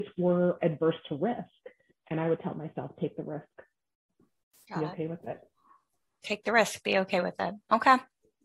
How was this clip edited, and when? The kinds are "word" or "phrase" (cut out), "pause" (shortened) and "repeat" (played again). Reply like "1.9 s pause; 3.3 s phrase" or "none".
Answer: none